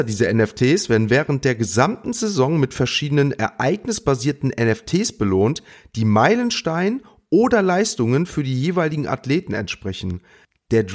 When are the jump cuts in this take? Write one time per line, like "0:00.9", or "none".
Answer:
none